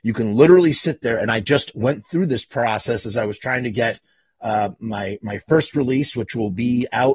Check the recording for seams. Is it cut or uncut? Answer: uncut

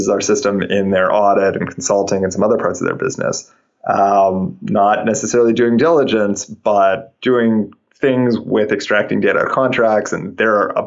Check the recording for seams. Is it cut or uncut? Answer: uncut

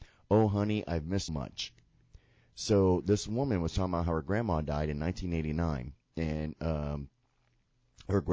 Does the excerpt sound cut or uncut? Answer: cut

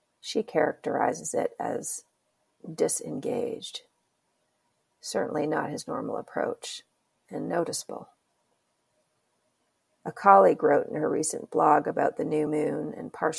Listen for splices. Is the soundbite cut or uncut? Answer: uncut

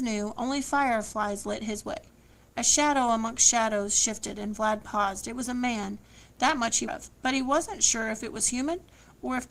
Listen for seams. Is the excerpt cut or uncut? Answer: cut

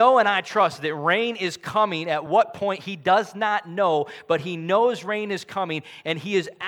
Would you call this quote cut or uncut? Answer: uncut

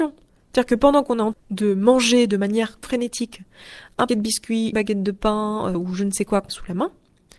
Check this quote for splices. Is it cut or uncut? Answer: cut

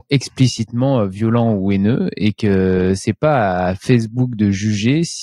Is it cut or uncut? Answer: uncut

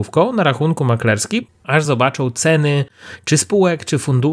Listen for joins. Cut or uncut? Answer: uncut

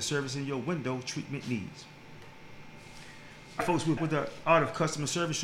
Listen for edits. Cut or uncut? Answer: cut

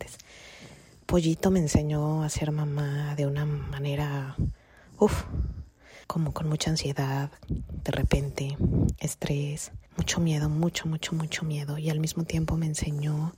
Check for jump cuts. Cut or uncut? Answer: cut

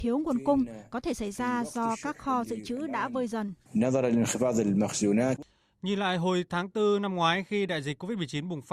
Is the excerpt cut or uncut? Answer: uncut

